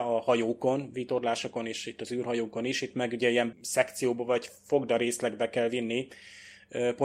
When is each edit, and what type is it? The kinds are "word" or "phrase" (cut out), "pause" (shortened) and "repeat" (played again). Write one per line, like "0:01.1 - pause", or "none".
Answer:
0:03.5 - word